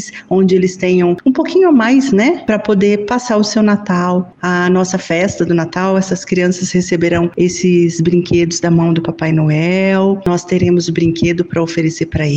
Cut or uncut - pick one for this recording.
uncut